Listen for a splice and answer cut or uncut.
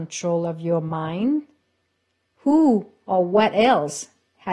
uncut